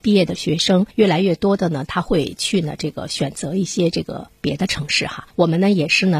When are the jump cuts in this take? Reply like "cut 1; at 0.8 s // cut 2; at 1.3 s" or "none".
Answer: cut 1; at 0.9 s // cut 2; at 5.3 s